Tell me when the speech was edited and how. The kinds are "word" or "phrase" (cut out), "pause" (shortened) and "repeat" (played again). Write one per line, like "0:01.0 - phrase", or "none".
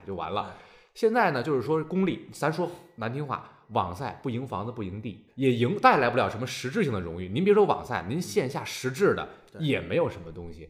0:05.3 - word